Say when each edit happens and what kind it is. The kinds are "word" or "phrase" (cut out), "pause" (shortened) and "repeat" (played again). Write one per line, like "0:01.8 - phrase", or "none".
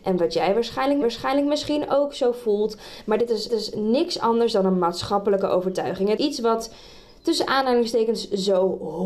0:01.0 - repeat
0:03.5 - repeat
0:06.2 - word